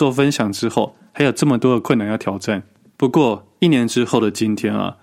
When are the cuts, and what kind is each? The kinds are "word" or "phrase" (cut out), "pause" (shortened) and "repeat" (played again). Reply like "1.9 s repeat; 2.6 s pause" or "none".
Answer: none